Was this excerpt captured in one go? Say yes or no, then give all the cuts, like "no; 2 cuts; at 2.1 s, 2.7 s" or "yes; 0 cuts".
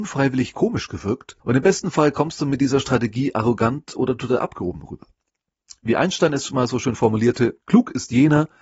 no; 2 cuts; at 1.4 s, 7.6 s